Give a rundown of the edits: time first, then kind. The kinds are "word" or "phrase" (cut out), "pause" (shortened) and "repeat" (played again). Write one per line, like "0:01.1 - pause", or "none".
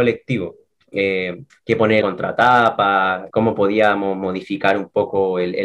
0:01.5 - pause
0:02.0 - word
0:03.3 - word

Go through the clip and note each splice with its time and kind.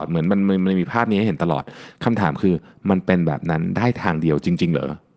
none

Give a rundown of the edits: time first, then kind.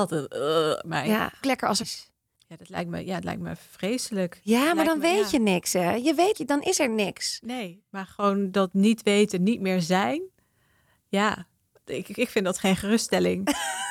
0:01.4 - phrase
0:01.8 - phrase
0:06.3 - phrase

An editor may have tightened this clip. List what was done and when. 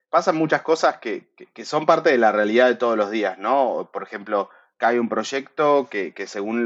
none

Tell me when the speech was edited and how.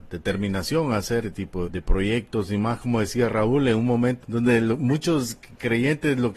0:01.2 - word
0:01.6 - word
0:04.2 - word

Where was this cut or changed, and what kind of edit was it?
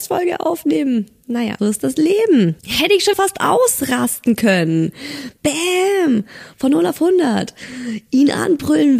0:01.6 - word
0:02.6 - pause
0:03.1 - word

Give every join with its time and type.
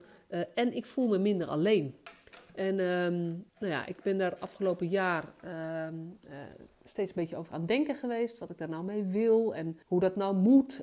0:03.5 - pause
0:09.8 - pause

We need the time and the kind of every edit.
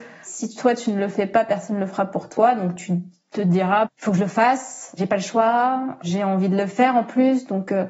0:03.8 - word

